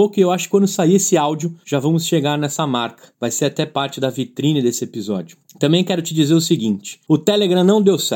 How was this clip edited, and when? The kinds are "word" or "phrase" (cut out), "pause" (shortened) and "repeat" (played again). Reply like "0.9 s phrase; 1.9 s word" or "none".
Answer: none